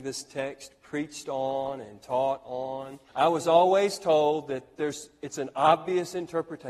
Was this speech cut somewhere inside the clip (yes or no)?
yes